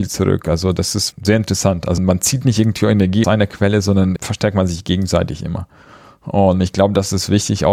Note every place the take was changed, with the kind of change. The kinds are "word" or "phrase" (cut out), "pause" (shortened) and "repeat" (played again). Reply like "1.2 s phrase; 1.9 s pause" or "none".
1.1 s word; 2.0 s word; 3.2 s word; 4.2 s word